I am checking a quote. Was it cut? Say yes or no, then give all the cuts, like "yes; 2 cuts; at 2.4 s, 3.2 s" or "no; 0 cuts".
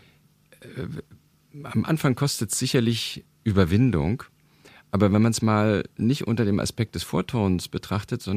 no; 0 cuts